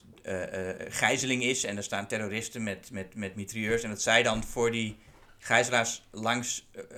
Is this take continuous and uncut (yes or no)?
yes